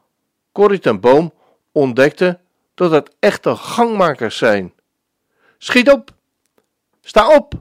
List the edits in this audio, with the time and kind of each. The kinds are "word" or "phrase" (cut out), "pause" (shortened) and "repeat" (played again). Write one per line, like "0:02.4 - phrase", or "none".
none